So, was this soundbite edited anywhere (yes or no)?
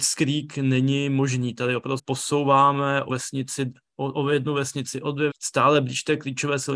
yes